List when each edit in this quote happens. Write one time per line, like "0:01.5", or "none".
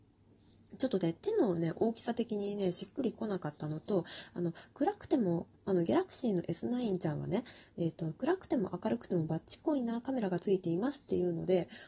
0:05.6

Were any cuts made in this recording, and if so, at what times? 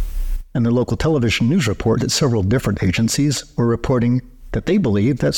0:02.0

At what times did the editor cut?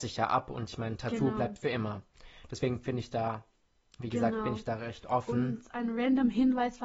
none

